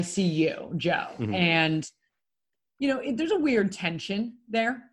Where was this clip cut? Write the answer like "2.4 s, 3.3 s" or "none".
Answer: none